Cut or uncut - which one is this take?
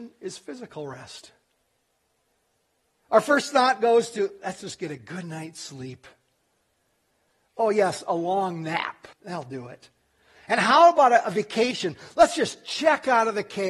cut